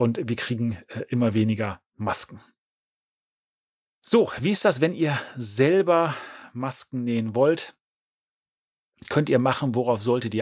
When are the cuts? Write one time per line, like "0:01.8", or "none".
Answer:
none